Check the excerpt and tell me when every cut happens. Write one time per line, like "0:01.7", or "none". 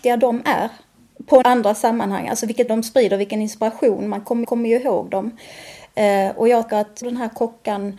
0:01.4
0:02.7
0:04.4
0:06.7
0:07.0